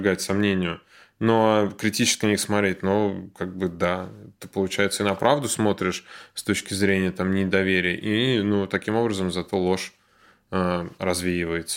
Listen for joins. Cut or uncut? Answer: uncut